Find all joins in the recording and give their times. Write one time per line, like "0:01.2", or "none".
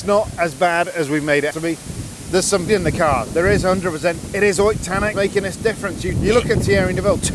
0:01.5
0:02.7
0:04.3
0:05.1
0:06.1